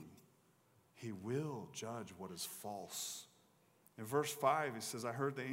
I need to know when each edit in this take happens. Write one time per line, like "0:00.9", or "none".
none